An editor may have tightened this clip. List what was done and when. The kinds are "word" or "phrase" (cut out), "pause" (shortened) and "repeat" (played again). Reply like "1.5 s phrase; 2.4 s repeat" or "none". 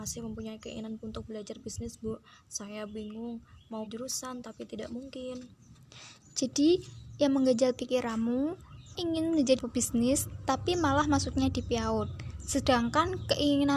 1.0 s word; 3.9 s word; 9.0 s word; 9.6 s word